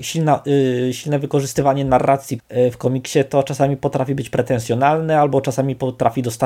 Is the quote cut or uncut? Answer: cut